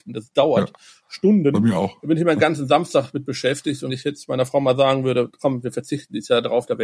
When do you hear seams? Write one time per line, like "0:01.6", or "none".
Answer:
0:03.9